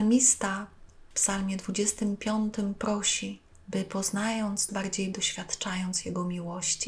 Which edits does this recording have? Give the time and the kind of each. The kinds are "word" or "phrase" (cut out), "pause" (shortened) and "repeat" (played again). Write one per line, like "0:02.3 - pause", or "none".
0:01.1 - word
0:03.5 - pause
0:04.7 - word
0:05.1 - phrase